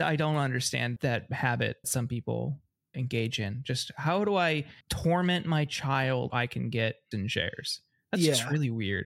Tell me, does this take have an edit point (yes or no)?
yes